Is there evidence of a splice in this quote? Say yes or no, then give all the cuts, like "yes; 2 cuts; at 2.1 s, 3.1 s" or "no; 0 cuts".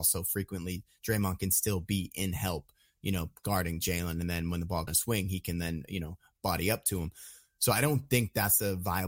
yes; 1 cut; at 4.9 s